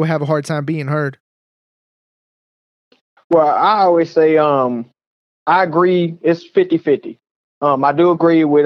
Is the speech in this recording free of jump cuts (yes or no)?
yes